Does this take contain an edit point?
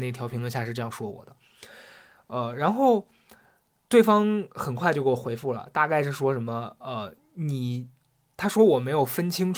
no; 0 cuts

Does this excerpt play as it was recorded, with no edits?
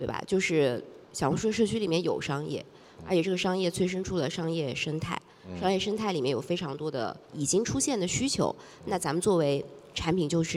no; 2 cuts; at 1.0 s, 7.2 s

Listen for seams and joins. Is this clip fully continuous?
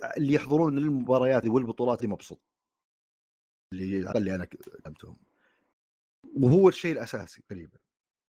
no; 3 cuts; at 1.4 s, 2.0 s, 4.1 s

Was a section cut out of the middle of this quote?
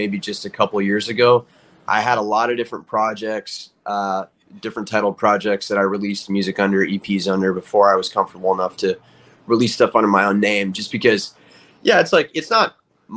no; 0 cuts

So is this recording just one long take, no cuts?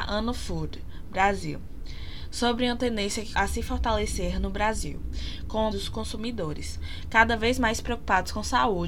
no; 2 cuts; at 3.3 s, 5.7 s

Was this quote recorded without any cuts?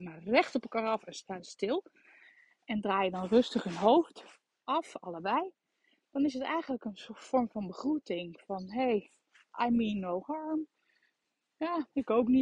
yes; 0 cuts

